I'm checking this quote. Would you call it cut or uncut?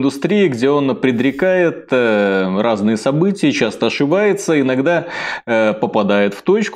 uncut